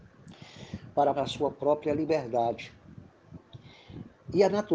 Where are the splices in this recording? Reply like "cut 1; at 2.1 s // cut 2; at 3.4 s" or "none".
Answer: cut 1; at 1.1 s

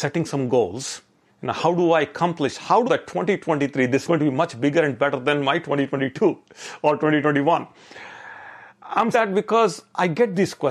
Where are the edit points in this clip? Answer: cut 1; at 1.3 s // cut 2; at 2.9 s // cut 3; at 4.1 s // cut 4; at 9.1 s

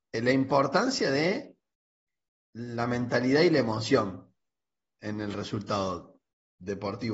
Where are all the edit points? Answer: none

